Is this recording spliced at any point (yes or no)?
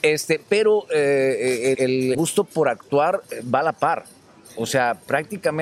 yes